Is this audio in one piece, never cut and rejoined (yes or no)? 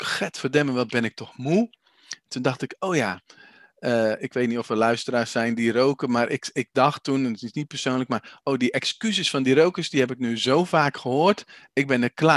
yes